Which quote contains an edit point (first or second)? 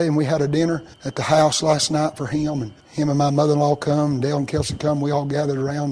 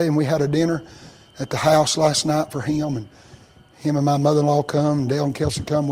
first